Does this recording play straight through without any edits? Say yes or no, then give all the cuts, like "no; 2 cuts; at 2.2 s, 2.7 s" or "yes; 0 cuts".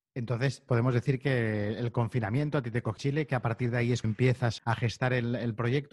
no; 3 cuts; at 3.0 s, 4.0 s, 4.6 s